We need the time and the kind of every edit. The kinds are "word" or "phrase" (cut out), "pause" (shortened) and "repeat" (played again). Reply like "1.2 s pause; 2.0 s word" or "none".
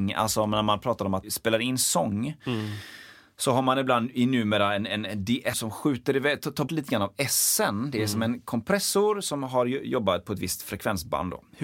1.2 s word; 5.5 s word; 6.7 s word